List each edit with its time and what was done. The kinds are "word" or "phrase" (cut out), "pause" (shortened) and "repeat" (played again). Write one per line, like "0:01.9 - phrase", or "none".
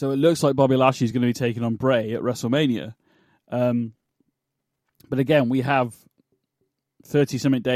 none